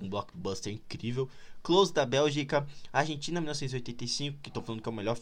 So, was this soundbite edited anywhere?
no; 0 cuts

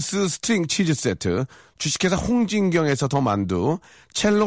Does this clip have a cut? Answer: no; 0 cuts

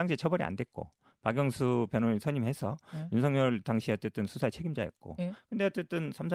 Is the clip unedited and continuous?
yes; 0 cuts

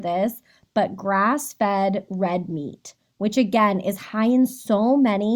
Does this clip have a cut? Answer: no; 0 cuts

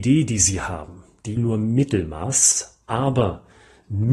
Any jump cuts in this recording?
yes; 1 cut; at 1.4 s

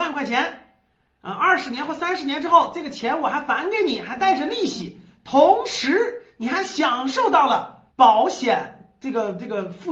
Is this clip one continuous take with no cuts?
no; 1 cut; at 7.9 s

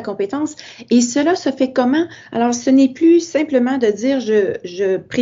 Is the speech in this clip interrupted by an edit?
no; 0 cuts

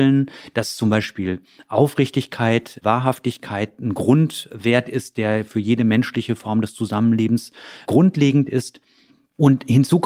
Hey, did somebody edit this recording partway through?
no; 0 cuts

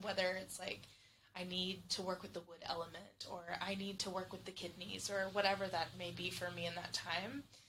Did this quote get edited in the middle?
no; 0 cuts

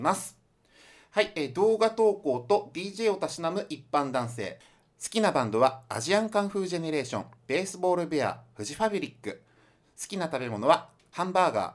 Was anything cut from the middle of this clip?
no; 0 cuts

